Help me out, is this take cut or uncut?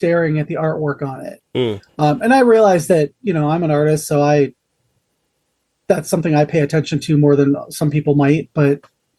uncut